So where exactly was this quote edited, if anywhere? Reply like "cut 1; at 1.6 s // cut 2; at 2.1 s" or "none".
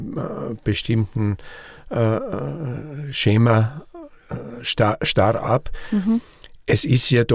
none